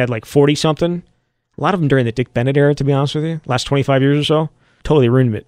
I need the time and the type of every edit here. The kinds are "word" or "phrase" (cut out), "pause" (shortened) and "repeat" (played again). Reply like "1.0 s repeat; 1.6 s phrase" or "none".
none